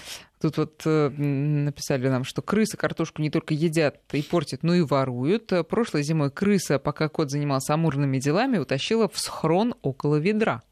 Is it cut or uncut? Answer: uncut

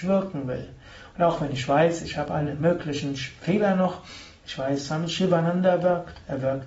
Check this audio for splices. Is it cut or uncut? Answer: uncut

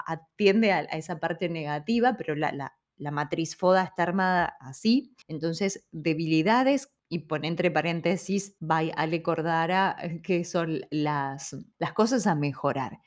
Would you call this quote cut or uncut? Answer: cut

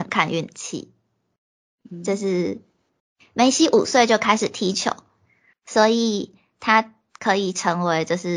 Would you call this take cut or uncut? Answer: uncut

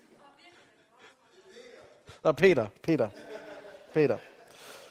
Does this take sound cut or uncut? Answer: uncut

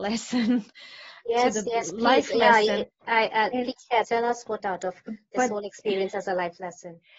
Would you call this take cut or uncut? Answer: cut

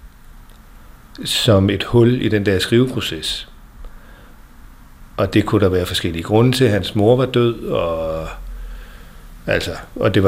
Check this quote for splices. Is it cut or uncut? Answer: uncut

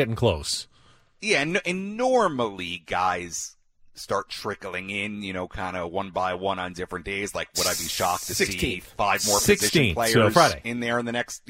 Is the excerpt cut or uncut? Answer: uncut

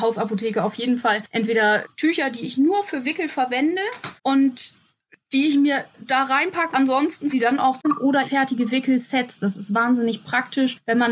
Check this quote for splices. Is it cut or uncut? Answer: cut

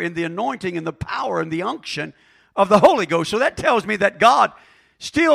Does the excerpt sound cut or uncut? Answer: uncut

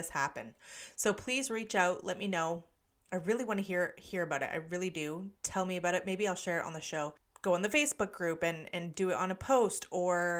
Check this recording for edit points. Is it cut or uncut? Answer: uncut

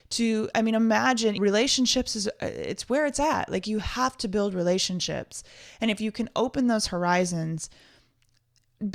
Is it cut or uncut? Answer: cut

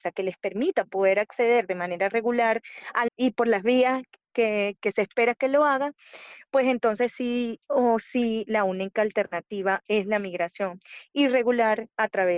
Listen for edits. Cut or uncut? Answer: cut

